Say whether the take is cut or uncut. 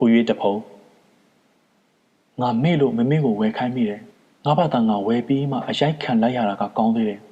cut